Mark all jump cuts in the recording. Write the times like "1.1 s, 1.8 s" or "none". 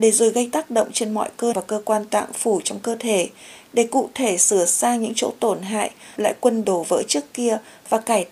1.5 s, 6.2 s, 6.6 s